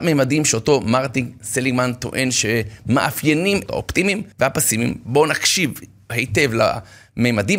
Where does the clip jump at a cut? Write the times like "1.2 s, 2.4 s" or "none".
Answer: 3.7 s, 4.3 s